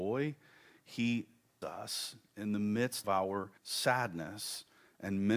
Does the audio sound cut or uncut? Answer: cut